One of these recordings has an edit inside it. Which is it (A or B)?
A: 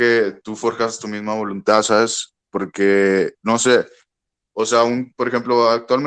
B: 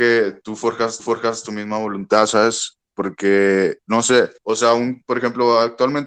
B